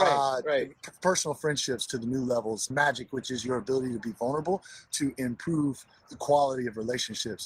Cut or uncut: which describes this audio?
cut